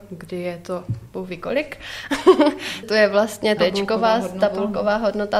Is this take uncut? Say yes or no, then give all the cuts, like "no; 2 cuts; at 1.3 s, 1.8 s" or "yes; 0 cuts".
no; 2 cuts; at 2.8 s, 3.6 s